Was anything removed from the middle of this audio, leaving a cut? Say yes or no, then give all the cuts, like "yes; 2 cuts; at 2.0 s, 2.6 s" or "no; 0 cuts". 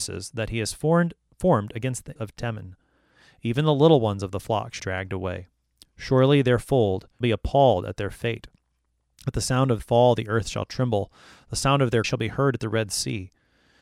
yes; 5 cuts; at 2.2 s, 4.8 s, 7.2 s, 9.8 s, 12.0 s